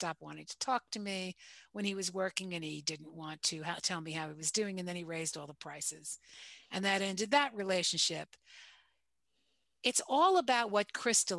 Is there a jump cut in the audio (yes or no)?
no